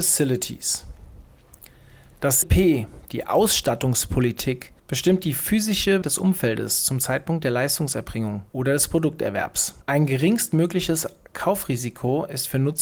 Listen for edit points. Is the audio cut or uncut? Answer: cut